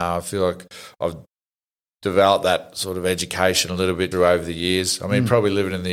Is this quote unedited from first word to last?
no; 1 cut; at 4.1 s

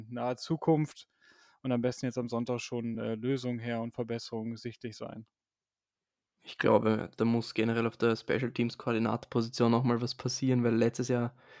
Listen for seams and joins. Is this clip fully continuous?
yes; 0 cuts

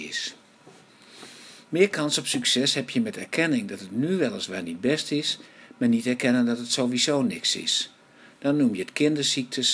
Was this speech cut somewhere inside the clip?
no; 0 cuts

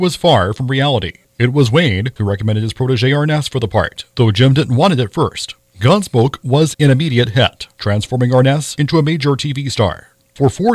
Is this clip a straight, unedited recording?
no; 1 cut; at 1.3 s

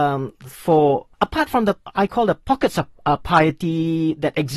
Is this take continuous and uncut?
yes; 0 cuts

